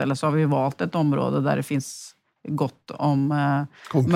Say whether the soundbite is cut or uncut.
uncut